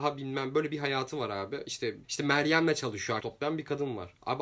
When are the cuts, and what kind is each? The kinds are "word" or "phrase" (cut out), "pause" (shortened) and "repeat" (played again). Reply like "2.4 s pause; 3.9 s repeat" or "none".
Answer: 2.0 s word; 3.2 s word